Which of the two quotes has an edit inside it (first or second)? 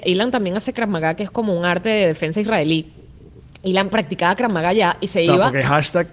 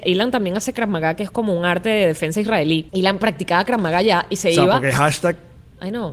second